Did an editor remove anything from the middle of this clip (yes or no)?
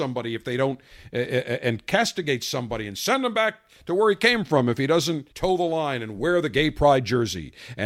yes